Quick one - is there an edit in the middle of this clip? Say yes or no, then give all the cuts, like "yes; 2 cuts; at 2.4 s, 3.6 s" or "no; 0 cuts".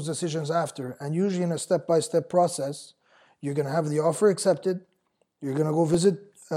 no; 0 cuts